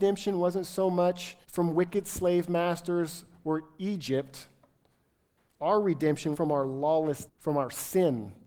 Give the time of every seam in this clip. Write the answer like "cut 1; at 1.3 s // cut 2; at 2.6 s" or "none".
cut 1; at 1.4 s // cut 2; at 6.3 s // cut 3; at 7.3 s